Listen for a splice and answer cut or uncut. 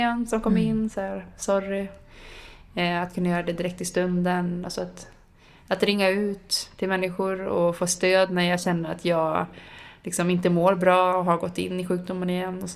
uncut